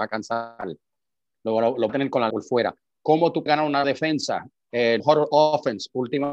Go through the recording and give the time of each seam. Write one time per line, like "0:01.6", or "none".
0:01.9
0:02.3
0:03.5
0:03.8
0:05.0

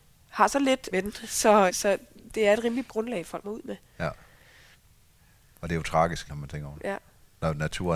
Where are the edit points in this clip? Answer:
0:00.9
0:01.7
0:02.9
0:03.4
0:06.3

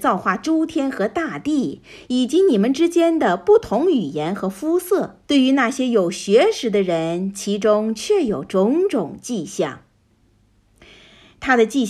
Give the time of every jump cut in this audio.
0:05.2

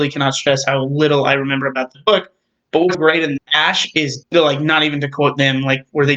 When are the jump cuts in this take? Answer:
0:02.9
0:03.4
0:04.2

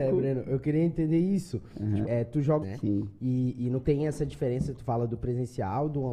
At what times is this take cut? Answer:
0:02.0
0:02.6
0:03.8

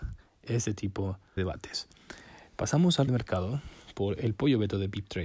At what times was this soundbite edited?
0:01.4
0:03.1

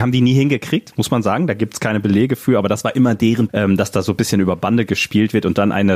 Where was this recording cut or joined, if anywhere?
0:03.5

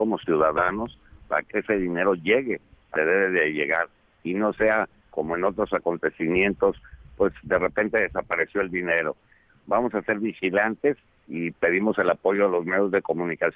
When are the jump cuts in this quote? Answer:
0:01.5
0:03.0

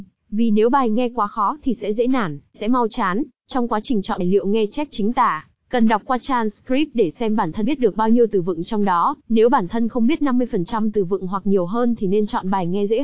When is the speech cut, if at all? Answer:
0:02.5
0:03.4
0:04.2
0:07.6
0:09.2

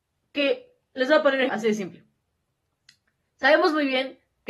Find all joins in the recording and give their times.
0:01.5

